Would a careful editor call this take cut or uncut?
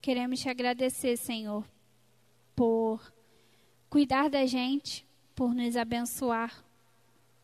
uncut